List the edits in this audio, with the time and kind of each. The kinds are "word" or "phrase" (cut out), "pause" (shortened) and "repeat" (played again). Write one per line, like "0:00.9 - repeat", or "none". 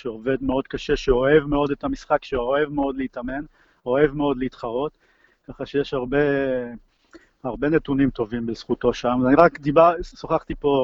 none